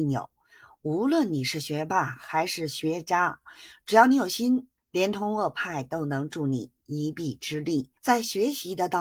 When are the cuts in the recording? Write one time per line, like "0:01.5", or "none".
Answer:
0:04.8
0:08.0